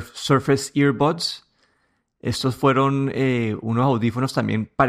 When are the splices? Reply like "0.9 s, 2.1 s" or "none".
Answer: none